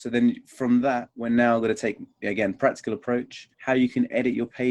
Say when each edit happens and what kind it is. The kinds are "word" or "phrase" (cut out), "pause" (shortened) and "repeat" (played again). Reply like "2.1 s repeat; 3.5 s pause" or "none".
3.5 s pause